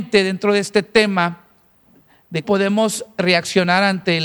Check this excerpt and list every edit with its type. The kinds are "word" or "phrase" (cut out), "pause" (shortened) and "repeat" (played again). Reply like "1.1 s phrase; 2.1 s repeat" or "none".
2.4 s word

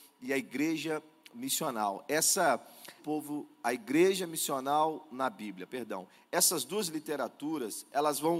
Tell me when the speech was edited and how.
3.0 s phrase

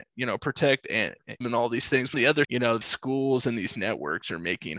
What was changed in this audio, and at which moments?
1.4 s word; 2.1 s word; 2.4 s word; 2.8 s word

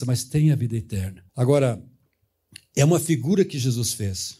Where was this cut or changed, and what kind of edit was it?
1.3 s pause

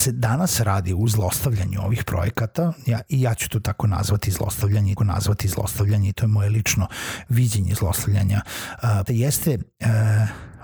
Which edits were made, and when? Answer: 5.0 s repeat; 9.1 s word

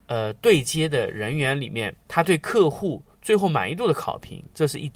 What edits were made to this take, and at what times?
2.0 s pause

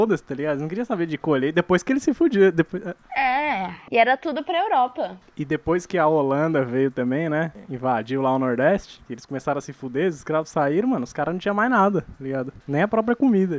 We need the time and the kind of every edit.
3.0 s pause

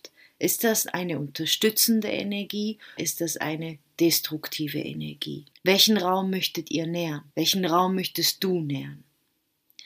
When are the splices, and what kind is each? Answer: 3.0 s word; 5.5 s pause; 7.3 s pause

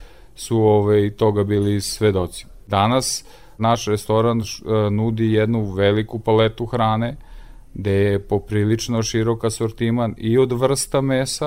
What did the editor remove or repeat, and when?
none

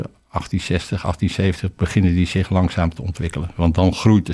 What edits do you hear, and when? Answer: none

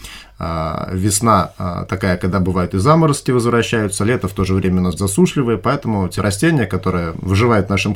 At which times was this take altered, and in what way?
5.0 s word; 6.2 s word

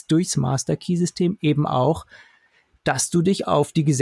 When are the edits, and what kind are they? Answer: none

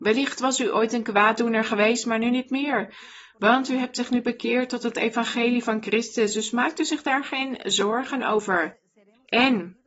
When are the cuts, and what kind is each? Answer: none

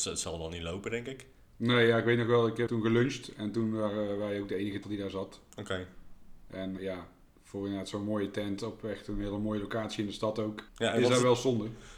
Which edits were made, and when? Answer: 2.7 s word; 4.8 s word; 6.8 s word; 10.7 s pause

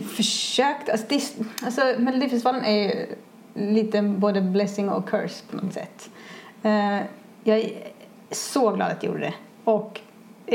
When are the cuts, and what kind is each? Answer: none

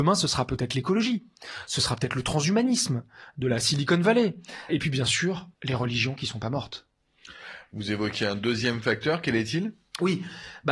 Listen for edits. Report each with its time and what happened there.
4.7 s word; 5.5 s pause

